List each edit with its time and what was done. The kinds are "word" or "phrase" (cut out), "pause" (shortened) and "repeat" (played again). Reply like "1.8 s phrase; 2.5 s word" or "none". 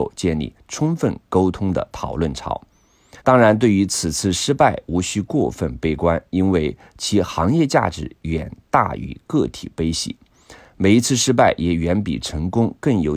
3.2 s pause